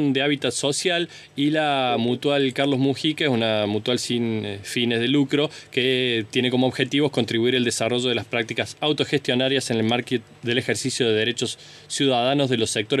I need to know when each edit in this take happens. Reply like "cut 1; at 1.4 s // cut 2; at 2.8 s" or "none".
none